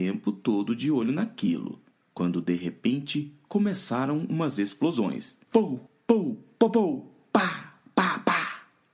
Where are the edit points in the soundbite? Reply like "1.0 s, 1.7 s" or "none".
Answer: none